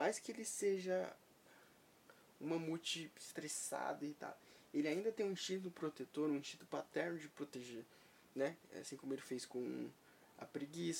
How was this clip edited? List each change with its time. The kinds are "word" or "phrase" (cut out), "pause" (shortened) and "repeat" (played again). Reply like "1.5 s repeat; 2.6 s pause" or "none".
none

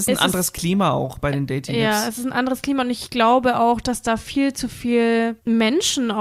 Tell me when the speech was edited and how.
none

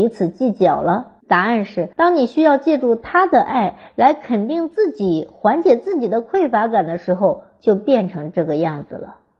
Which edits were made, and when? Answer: 1.2 s pause; 1.9 s pause

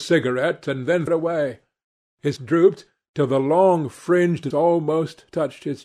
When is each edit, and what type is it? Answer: 1.1 s word; 2.4 s word; 4.5 s word

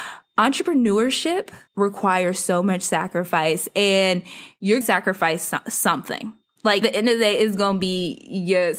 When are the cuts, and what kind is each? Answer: 1.7 s pause; 4.8 s word; 6.8 s word

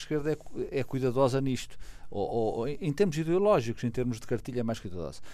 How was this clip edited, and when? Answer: none

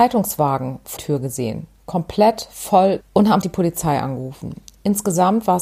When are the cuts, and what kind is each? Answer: 1.0 s word; 3.0 s word; 3.4 s word

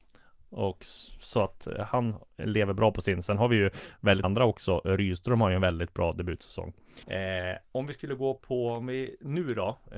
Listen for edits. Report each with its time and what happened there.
4.2 s word; 7.0 s pause

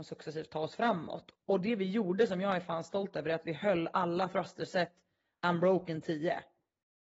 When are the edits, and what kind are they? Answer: none

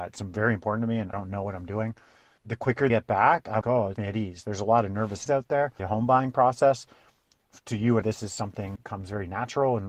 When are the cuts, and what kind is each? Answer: 1.1 s word; 2.4 s word; 2.9 s word; 3.6 s word; 4.0 s word; 5.3 s word; 5.8 s word; 8.0 s word; 8.8 s word

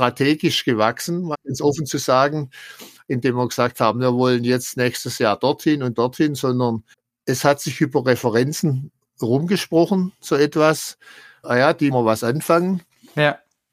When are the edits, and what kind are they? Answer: 1.3 s word; 5.9 s word; 6.9 s pause; 11.9 s phrase

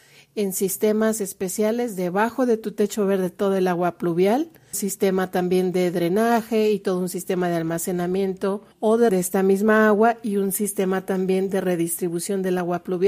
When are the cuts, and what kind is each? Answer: 4.7 s phrase; 8.7 s pause; 9.1 s word

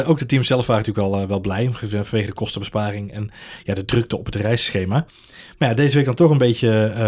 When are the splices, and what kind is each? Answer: none

